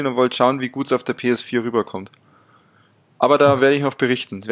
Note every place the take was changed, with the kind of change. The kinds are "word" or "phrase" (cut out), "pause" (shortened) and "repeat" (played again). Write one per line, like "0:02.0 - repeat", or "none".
none